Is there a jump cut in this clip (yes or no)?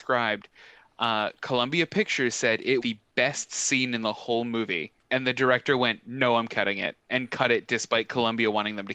yes